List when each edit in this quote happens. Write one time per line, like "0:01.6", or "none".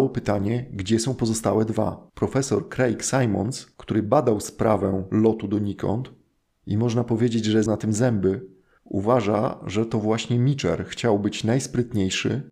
0:02.1
0:07.7